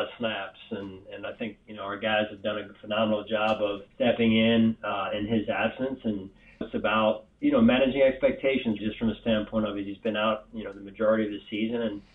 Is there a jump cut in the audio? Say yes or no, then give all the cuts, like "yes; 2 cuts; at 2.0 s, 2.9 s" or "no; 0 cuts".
yes; 3 cuts; at 3.9 s, 6.6 s, 8.8 s